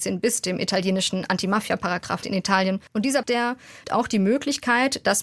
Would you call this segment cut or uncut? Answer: cut